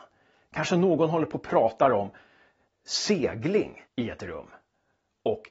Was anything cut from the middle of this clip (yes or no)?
yes